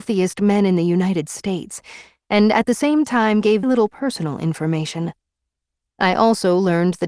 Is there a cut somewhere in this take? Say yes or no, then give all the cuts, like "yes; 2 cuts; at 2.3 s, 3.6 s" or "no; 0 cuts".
yes; 1 cut; at 3.6 s